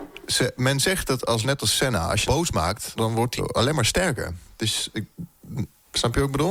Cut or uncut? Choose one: cut